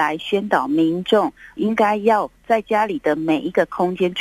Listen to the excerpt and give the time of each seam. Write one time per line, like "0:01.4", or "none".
0:01.6
0:02.4